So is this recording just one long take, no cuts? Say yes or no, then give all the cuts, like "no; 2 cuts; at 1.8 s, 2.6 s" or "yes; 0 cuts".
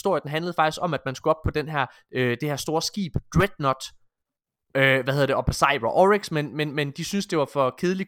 yes; 0 cuts